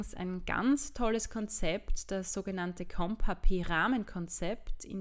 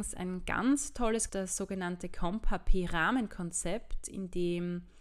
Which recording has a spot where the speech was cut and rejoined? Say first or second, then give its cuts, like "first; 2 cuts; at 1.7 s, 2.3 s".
second; 1 cut; at 1.3 s